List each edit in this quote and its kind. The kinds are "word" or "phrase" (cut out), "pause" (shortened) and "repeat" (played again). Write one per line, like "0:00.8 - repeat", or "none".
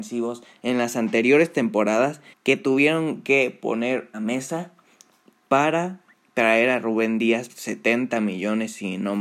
0:02.3 - pause
0:04.1 - phrase
0:06.1 - pause
0:07.5 - word

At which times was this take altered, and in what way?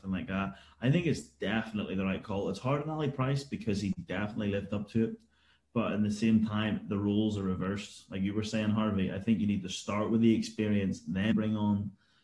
0:11.3 - word

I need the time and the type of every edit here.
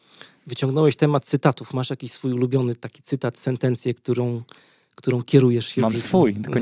none

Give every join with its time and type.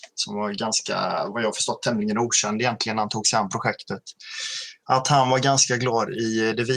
none

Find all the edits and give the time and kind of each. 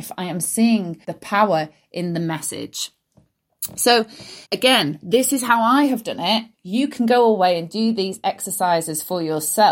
0:01.0 - pause
0:04.4 - pause
0:06.5 - pause

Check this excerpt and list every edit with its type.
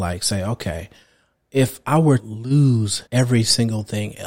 0:02.2 - word
0:03.1 - pause

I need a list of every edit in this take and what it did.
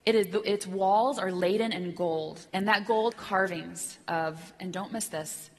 0:02.5 - pause
0:03.1 - word

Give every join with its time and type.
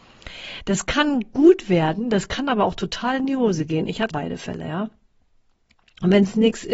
0:04.1 - word

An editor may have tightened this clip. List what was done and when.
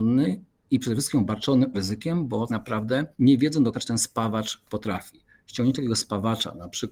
0:01.7 - word
0:02.5 - word
0:03.1 - pause
0:03.7 - word
0:04.7 - word

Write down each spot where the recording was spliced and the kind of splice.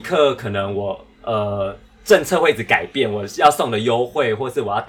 0:01.1 - pause

